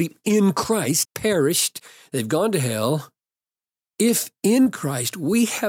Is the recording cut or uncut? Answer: cut